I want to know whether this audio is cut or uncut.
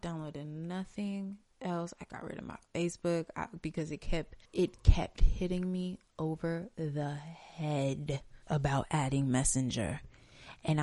cut